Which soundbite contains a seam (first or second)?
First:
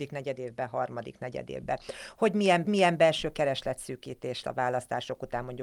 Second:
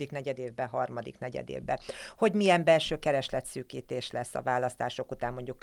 first